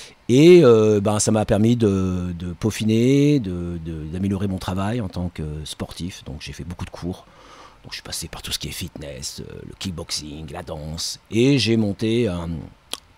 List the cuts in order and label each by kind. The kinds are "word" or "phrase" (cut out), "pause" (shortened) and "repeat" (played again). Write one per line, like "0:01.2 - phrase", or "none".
none